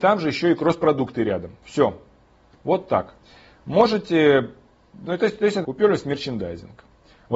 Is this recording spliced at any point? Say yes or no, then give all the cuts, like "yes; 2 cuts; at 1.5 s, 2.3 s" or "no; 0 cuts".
yes; 2 cuts; at 5.0 s, 5.6 s